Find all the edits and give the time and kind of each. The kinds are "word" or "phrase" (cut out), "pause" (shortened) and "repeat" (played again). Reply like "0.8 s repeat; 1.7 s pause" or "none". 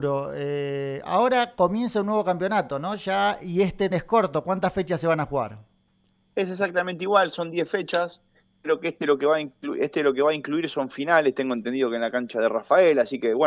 3.9 s word